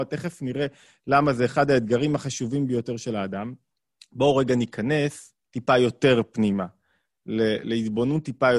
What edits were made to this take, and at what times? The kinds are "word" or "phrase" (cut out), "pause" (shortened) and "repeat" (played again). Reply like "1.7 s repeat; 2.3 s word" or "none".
3.7 s pause; 5.4 s pause